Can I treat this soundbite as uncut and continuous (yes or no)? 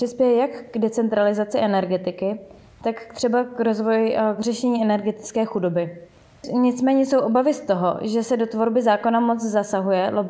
yes